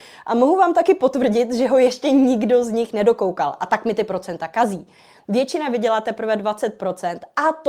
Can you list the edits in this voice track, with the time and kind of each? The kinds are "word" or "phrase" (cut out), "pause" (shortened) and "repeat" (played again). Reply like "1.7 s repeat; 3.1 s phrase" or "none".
none

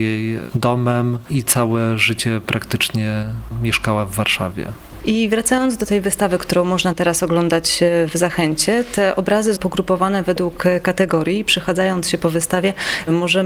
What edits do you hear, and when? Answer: 9.6 s word

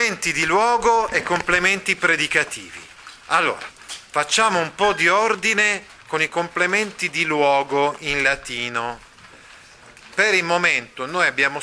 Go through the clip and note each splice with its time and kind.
none

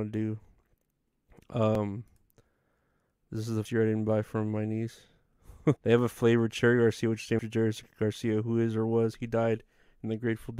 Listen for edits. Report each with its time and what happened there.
3.7 s word; 5.8 s word; 7.4 s word

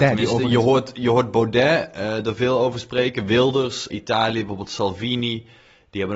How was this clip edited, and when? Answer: 3.9 s phrase

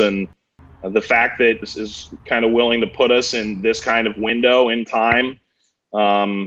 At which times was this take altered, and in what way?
1.6 s word; 4.9 s word

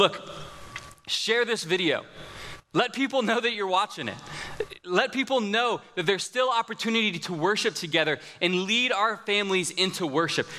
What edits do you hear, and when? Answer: none

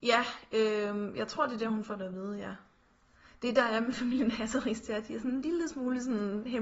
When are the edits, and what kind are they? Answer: none

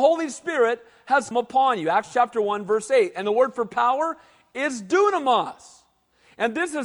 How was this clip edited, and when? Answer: 1.3 s word

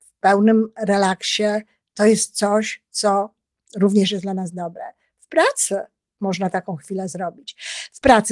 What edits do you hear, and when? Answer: none

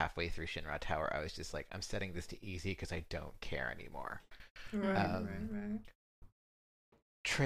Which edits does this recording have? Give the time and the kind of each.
none

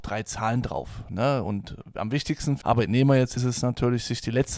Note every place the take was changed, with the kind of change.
2.6 s word; 3.4 s phrase

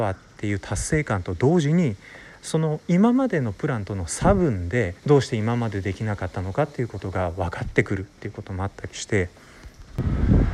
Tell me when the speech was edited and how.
5.0 s pause

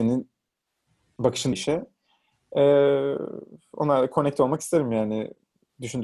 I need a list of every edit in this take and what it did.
1.5 s word

